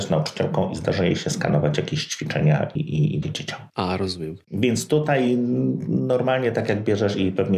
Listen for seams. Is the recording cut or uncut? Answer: cut